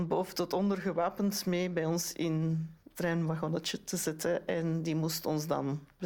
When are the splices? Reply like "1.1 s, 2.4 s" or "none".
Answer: 2.9 s